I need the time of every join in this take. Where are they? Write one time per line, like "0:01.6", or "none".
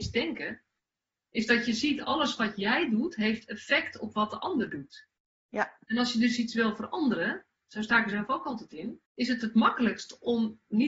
0:09.1